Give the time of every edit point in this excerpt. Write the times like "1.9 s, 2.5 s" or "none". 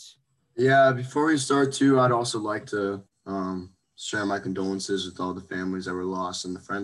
3.8 s